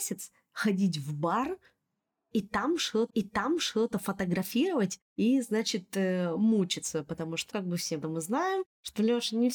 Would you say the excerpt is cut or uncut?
cut